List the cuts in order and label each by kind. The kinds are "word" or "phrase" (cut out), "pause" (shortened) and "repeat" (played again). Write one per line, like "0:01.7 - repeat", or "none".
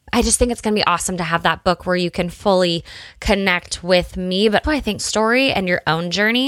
0:04.6 - word
0:05.0 - phrase